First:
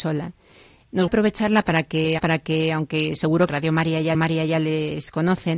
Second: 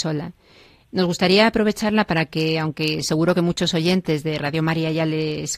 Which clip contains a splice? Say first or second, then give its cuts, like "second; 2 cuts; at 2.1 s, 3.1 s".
first; 4 cuts; at 1.1 s, 2.2 s, 3.5 s, 4.1 s